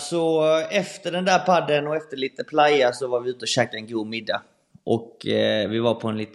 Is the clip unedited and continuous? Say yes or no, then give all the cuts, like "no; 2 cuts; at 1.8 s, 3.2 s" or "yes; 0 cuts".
yes; 0 cuts